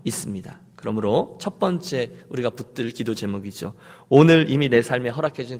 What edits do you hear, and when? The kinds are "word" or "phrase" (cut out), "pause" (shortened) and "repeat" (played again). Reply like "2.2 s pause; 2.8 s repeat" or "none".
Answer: none